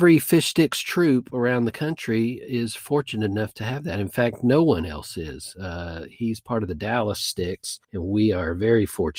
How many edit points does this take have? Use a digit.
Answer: 1